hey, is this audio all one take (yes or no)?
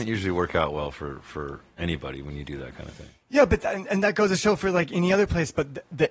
yes